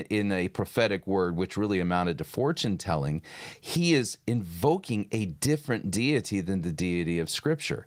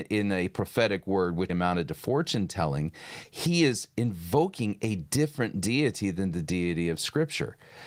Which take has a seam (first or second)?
second